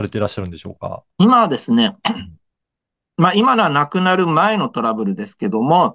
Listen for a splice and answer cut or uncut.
cut